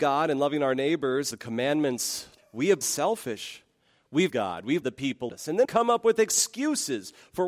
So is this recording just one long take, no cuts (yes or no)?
no